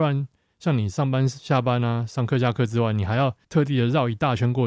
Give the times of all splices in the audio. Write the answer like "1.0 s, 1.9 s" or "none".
3.4 s